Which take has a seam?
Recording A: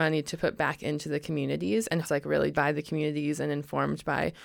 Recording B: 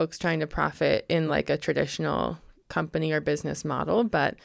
A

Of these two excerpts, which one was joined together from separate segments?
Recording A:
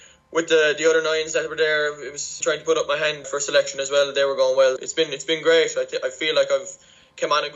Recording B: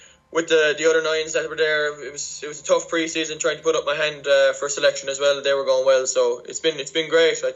A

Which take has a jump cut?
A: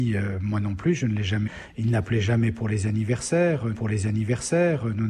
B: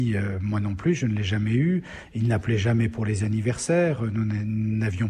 A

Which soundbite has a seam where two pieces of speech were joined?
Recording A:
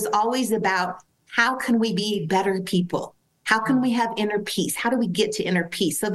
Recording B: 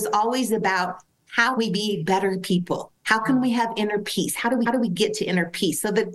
B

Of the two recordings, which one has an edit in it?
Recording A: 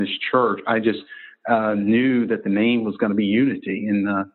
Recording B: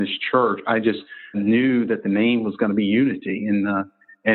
B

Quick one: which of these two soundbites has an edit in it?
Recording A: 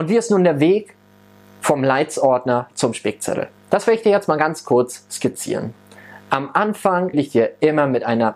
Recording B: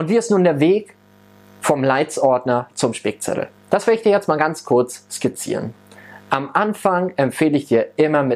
A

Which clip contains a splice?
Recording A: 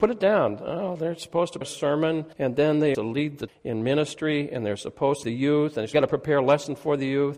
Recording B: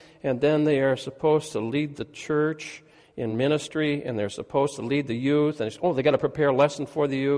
A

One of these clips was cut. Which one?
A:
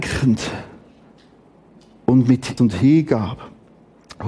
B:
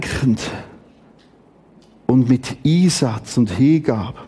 A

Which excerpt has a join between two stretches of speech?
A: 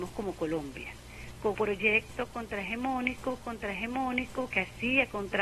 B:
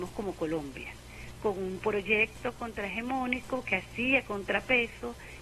A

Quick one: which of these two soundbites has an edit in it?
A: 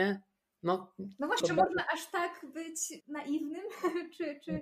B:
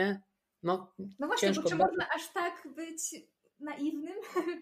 A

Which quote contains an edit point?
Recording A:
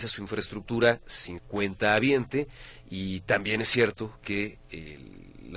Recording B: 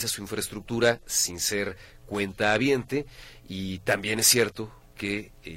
A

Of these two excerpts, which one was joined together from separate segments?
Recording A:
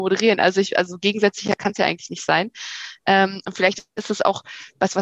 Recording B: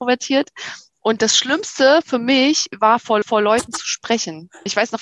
B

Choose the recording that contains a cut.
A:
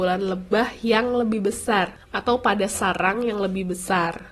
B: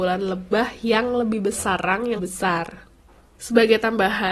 B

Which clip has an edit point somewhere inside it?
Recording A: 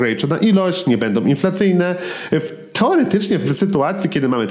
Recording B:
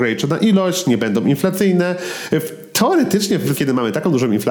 B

